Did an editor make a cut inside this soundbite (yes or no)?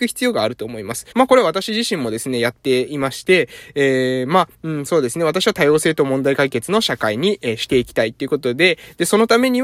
yes